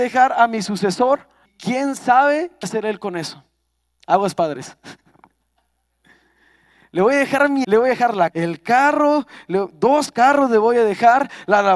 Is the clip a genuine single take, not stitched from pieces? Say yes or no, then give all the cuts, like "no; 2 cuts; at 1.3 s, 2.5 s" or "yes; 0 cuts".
no; 4 cuts; at 1.5 s, 2.6 s, 7.6 s, 8.3 s